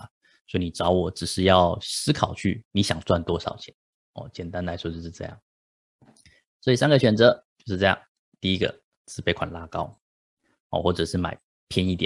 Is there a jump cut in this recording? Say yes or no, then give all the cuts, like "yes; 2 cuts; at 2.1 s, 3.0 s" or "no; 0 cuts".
no; 0 cuts